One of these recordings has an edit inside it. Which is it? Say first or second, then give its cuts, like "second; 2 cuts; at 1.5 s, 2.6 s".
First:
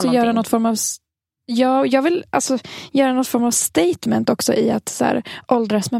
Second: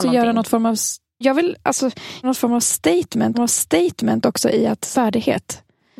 second; 4 cuts; at 1.2 s, 2.2 s, 3.3 s, 4.9 s